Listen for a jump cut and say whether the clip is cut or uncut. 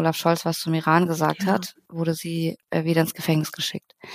cut